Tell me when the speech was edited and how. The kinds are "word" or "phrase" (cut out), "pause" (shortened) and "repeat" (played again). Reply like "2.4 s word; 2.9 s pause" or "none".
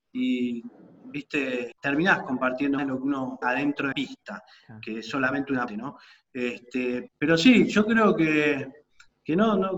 1.7 s word; 2.8 s word; 3.4 s word; 3.9 s word; 5.7 s word; 7.1 s word